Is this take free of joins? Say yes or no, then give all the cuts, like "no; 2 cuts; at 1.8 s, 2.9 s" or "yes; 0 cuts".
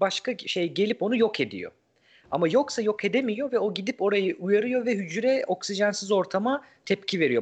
yes; 0 cuts